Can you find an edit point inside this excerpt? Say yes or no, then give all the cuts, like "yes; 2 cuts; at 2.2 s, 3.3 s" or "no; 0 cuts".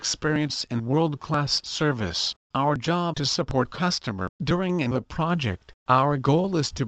yes; 6 cuts; at 2.4 s, 3.1 s, 3.6 s, 4.3 s, 4.9 s, 5.8 s